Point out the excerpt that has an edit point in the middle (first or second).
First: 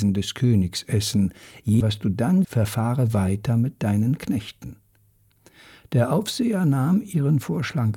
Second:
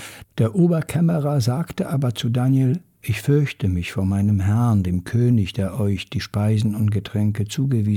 first